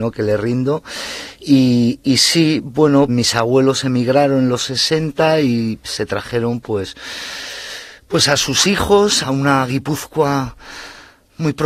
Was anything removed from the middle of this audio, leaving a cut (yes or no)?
yes